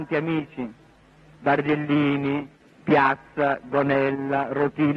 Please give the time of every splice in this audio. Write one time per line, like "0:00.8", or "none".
none